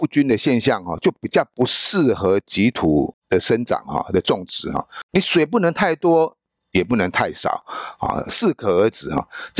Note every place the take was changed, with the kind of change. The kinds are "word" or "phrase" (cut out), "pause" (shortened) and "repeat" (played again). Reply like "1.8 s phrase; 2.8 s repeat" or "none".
none